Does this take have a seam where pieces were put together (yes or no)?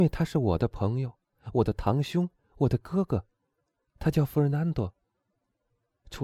no